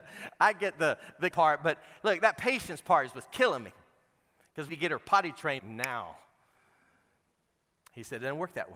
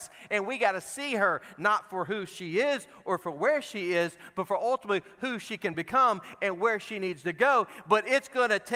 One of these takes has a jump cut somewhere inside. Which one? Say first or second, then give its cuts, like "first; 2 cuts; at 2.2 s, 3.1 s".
first; 3 cuts; at 1.3 s, 4.7 s, 5.6 s